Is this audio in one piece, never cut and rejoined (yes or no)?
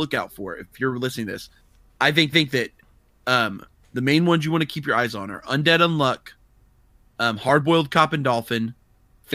no